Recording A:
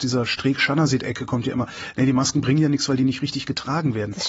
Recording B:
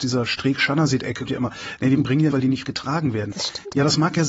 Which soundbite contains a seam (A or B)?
B